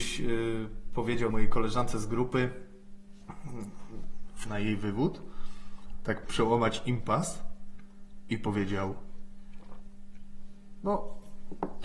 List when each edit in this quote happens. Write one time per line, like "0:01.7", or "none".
0:01.3
0:04.4
0:06.2